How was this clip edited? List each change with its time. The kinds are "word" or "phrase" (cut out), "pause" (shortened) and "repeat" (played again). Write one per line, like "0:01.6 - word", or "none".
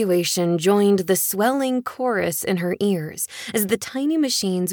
none